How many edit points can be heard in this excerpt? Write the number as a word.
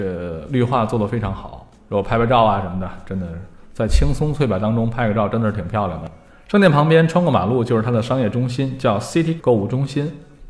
one